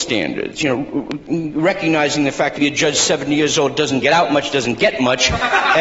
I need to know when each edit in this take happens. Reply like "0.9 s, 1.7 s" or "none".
2.6 s